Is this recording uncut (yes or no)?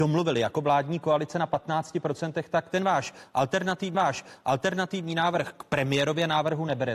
no